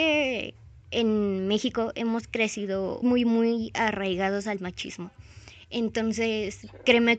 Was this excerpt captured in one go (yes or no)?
no